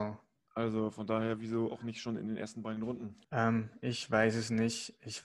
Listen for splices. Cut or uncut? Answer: cut